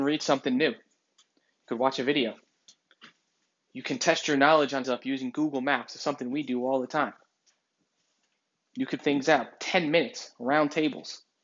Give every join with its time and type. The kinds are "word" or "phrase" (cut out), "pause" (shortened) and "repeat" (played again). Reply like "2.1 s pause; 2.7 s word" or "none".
4.8 s word; 9.0 s word